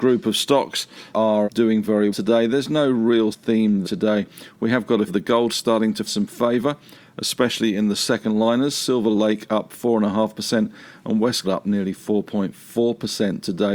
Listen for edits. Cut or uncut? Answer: cut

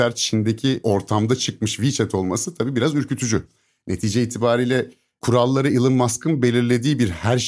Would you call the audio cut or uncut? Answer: uncut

